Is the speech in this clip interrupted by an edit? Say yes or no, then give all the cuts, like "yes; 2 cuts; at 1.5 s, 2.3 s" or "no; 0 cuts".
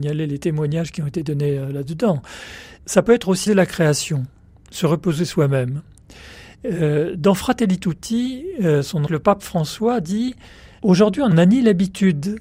yes; 2 cuts; at 3.5 s, 9.1 s